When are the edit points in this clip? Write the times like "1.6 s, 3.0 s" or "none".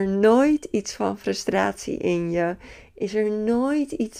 none

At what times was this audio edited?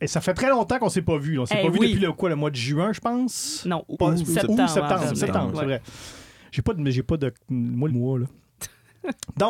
3.9 s, 7.9 s

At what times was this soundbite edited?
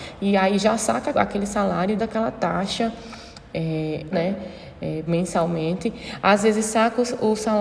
1.1 s, 2.0 s, 4.1 s, 5.1 s

